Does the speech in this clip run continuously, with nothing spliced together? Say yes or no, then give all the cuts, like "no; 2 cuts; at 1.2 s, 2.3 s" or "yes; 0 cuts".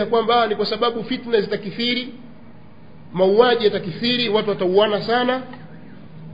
yes; 0 cuts